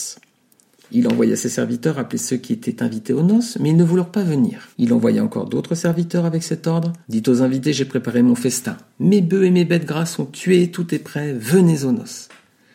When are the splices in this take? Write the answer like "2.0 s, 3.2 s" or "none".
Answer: 4.7 s, 7.0 s